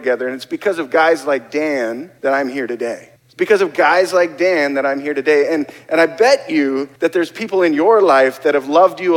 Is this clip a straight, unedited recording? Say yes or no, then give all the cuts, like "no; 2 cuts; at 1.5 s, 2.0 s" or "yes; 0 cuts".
no; 3 cuts; at 2.2 s, 3.2 s, 7.0 s